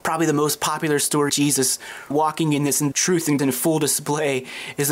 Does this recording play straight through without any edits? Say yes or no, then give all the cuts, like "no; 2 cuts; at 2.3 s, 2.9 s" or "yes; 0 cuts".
no; 4 cuts; at 1.3 s, 2.1 s, 2.9 s, 3.4 s